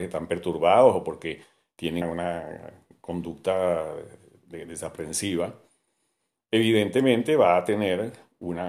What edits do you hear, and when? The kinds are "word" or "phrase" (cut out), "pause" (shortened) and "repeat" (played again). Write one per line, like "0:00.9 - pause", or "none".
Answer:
0:02.0 - word